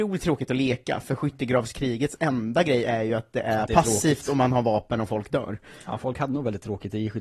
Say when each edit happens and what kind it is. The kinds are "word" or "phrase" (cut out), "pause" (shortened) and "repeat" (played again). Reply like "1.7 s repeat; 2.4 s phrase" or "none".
none